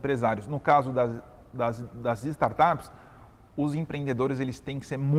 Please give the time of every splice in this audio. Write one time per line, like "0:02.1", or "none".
none